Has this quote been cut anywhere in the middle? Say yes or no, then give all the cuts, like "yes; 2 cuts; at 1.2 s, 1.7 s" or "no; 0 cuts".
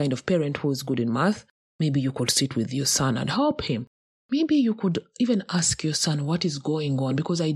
no; 0 cuts